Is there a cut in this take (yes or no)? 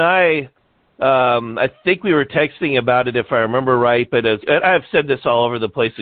yes